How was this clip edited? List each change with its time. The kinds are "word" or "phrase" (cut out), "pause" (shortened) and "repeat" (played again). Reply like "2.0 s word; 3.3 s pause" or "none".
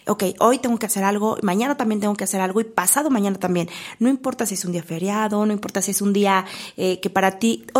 none